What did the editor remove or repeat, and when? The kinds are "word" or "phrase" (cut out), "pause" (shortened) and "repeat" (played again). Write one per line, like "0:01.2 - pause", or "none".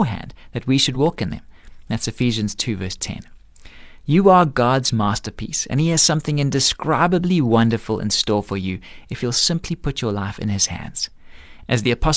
none